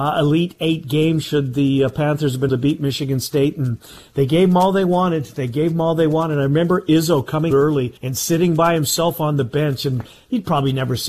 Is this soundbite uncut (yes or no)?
no